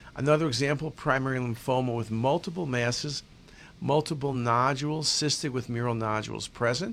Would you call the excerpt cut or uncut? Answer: uncut